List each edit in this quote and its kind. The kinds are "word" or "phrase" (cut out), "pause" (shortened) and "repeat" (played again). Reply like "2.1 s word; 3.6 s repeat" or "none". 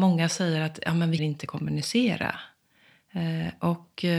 1.2 s word